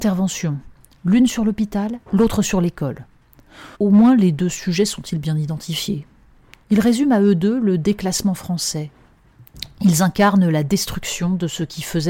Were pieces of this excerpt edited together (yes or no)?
yes